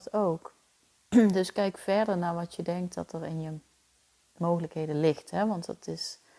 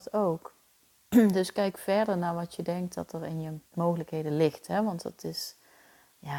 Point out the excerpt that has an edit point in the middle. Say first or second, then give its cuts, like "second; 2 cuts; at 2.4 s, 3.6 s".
second; 1 cut; at 3.7 s